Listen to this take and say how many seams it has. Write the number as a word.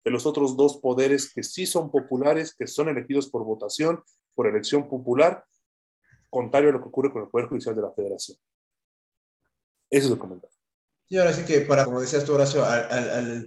two